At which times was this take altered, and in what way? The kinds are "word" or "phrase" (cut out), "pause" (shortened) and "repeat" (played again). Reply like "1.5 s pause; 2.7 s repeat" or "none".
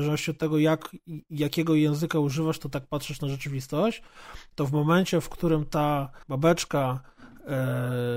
6.2 s pause

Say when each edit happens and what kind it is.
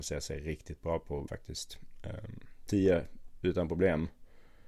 1.3 s phrase; 2.7 s word

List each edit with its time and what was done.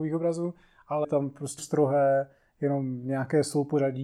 1.0 s word; 1.6 s word

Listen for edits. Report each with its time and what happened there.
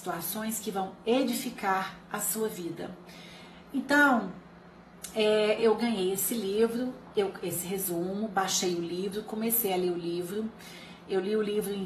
5.6 s word

